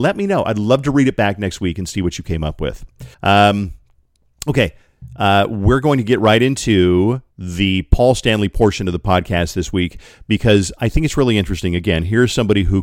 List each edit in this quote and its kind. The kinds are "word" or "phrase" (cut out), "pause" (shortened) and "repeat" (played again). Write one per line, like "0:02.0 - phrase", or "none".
0:03.1 - pause
0:07.3 - pause